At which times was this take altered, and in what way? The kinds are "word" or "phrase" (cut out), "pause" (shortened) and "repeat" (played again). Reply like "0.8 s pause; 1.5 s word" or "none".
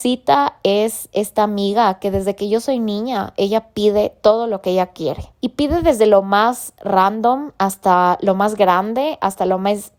5.3 s pause